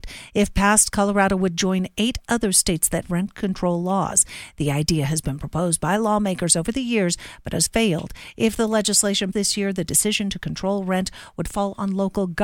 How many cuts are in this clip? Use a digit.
3